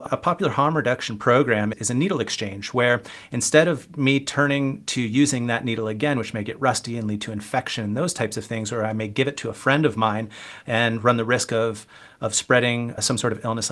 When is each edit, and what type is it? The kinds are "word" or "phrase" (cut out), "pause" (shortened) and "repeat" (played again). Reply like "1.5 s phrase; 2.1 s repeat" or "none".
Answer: none